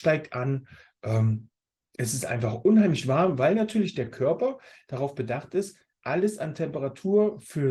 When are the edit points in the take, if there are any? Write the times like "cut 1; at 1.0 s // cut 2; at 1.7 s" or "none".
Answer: none